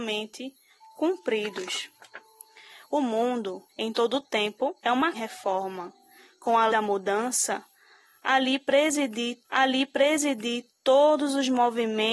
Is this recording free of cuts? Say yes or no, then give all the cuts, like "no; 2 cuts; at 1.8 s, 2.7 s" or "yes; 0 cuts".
no; 5 cuts; at 3.7 s, 4.8 s, 5.1 s, 6.7 s, 9.4 s